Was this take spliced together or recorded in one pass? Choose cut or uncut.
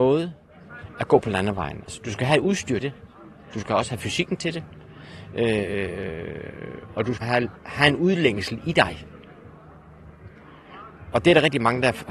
cut